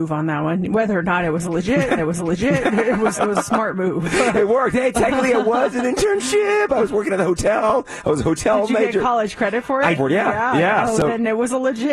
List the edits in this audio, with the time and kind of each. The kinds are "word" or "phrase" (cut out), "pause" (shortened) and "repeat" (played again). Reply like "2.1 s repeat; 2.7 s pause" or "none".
2.0 s repeat; 3.1 s word; 10.0 s phrase